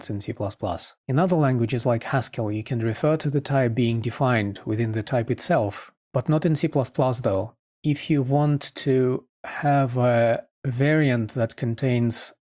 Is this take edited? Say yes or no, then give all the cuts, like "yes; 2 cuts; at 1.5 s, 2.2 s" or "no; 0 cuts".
yes; 1 cut; at 1.0 s